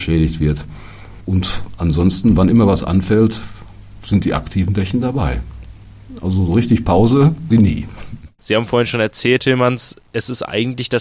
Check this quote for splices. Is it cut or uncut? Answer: cut